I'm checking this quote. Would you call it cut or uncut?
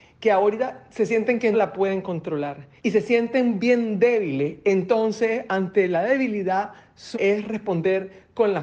cut